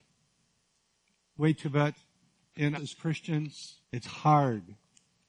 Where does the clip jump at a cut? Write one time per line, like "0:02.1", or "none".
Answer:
0:01.6
0:02.7
0:03.8

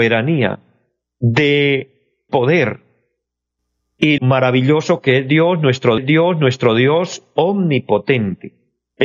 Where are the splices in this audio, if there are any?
0:02.3
0:04.2
0:06.0

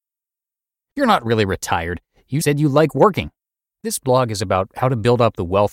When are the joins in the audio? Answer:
0:02.4
0:03.4

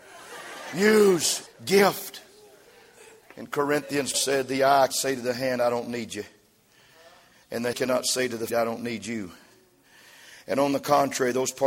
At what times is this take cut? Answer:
0:01.5
0:04.1
0:04.9
0:07.7
0:08.5

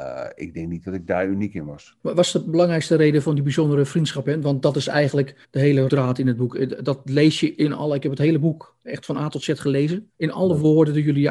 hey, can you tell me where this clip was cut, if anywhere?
0:05.4
0:05.9
0:10.1

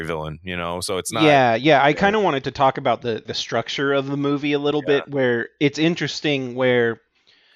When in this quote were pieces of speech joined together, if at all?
0:03.3

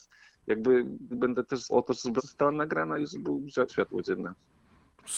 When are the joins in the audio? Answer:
0:01.1
0:01.7
0:02.2
0:03.7

